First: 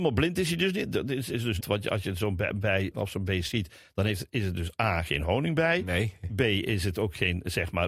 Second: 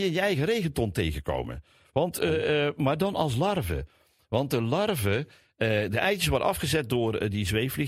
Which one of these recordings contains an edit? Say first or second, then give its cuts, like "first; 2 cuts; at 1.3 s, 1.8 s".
first; 2 cuts; at 1.6 s, 2.9 s